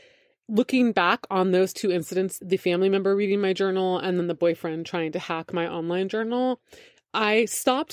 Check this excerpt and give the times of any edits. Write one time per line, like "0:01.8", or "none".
0:02.4